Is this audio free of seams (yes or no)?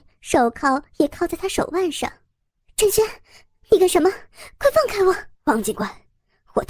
no